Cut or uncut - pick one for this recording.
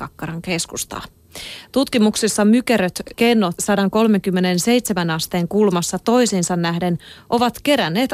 cut